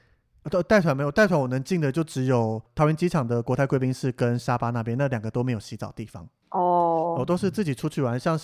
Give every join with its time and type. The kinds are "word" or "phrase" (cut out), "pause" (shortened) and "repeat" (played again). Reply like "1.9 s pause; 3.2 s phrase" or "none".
none